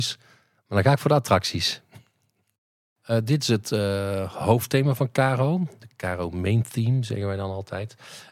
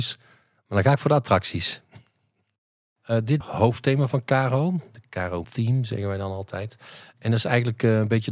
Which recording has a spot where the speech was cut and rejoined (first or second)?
second